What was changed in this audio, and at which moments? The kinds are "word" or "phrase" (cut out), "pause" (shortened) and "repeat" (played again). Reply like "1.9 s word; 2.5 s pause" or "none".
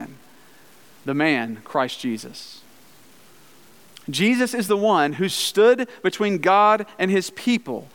none